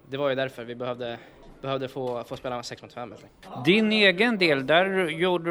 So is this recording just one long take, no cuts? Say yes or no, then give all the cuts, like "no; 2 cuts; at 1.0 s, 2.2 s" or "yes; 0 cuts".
yes; 0 cuts